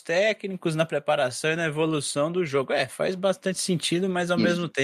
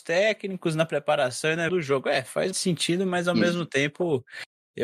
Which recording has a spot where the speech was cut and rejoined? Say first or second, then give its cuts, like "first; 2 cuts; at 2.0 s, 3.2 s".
second; 2 cuts; at 1.7 s, 2.5 s